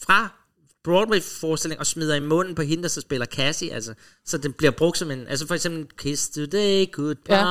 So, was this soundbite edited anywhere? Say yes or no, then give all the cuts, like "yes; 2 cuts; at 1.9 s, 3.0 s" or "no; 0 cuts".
no; 0 cuts